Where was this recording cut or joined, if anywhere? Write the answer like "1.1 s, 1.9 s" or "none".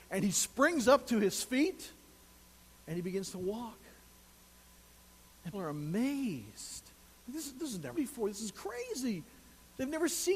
5.5 s, 7.9 s